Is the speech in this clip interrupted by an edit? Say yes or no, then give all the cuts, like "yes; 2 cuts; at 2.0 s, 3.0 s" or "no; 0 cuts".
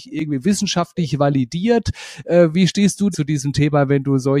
yes; 1 cut; at 3.1 s